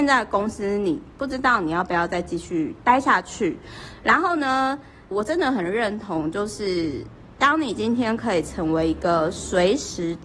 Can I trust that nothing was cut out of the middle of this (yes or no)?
no